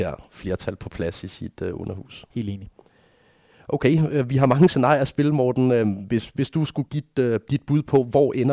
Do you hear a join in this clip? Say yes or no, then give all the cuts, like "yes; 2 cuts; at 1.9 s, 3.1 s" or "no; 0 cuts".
yes; 2 cuts; at 2.3 s, 6.9 s